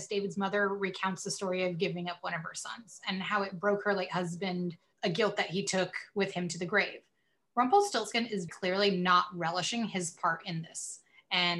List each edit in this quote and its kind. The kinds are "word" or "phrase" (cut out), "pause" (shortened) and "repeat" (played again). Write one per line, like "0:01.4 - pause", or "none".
0:08.5 - word